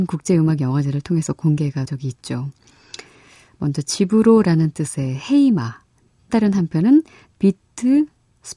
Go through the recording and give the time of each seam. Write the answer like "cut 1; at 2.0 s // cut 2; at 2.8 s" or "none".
cut 1; at 1.9 s // cut 2; at 6.3 s